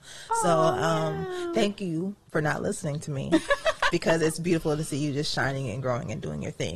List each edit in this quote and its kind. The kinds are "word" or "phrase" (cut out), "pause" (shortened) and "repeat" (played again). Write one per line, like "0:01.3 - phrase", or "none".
0:03.9 - word